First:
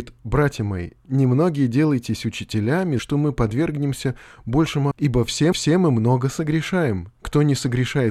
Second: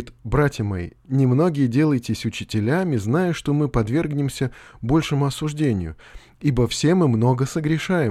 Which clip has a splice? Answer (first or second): first